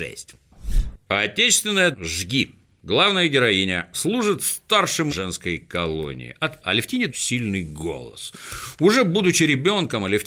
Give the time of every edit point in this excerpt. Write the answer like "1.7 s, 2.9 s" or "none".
1.9 s, 3.9 s, 5.1 s, 6.6 s, 7.1 s